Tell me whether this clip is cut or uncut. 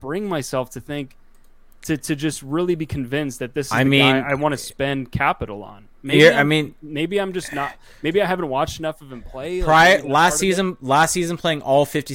uncut